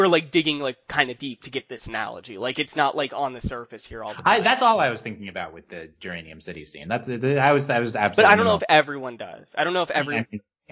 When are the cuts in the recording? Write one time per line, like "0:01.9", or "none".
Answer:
none